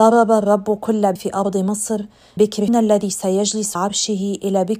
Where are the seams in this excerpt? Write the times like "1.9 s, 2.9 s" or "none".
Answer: 1.2 s, 2.4 s, 2.7 s, 3.8 s